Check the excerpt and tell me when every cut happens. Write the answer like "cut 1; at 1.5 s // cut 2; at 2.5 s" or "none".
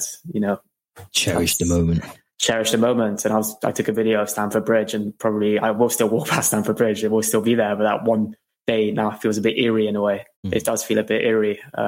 cut 1; at 10.3 s

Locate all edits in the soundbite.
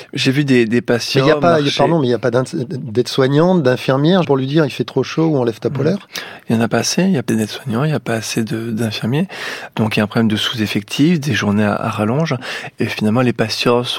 cut 1; at 4.2 s // cut 2; at 7.3 s

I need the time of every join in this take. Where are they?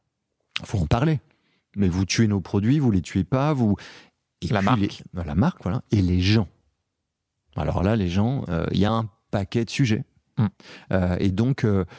none

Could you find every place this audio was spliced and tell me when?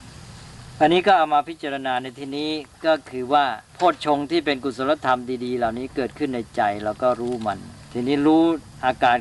cut 1; at 3.7 s

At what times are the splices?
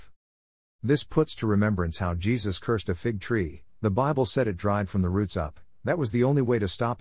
none

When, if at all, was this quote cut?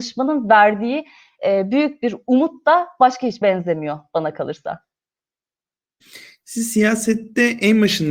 cut 1; at 3.4 s

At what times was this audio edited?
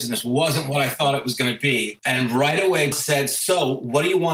cut 1; at 2.9 s

